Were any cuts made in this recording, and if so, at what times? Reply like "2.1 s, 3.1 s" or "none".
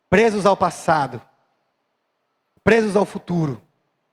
none